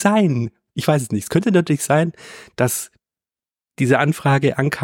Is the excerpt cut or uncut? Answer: uncut